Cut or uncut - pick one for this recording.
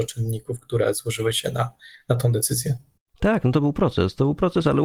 uncut